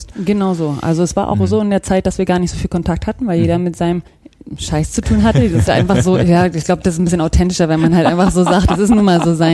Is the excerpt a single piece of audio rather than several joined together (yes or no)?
no